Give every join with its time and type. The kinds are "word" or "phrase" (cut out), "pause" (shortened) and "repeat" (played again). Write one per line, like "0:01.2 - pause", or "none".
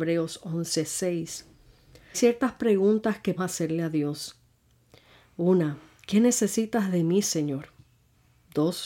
0:02.1 - word
0:03.4 - word